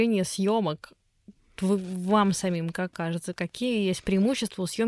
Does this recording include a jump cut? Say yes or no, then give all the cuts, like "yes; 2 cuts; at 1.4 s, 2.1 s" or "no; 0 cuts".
yes; 1 cut; at 1.6 s